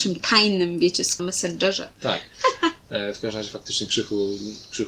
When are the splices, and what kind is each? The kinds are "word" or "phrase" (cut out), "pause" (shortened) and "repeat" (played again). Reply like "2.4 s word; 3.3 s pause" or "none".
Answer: 1.2 s phrase